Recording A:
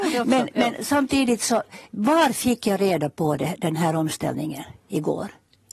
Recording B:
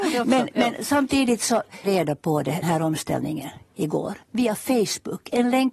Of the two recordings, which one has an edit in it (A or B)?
B